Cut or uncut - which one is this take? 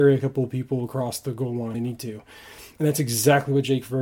cut